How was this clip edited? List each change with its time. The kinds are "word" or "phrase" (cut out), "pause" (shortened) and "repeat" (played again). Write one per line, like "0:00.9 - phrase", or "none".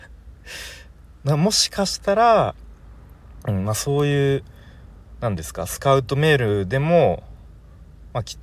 none